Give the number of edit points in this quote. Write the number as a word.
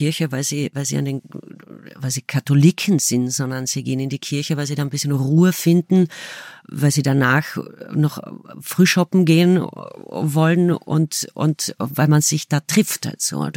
zero